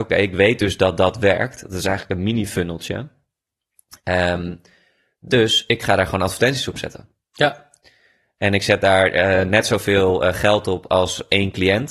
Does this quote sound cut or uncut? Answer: uncut